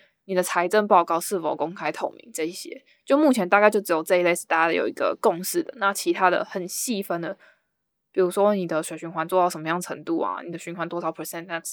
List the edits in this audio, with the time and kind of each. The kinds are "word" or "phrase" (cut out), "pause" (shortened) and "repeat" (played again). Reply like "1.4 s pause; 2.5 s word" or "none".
none